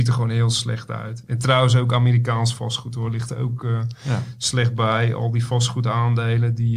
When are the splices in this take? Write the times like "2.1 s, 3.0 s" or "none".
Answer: none